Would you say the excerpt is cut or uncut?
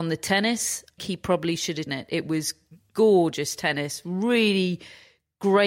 cut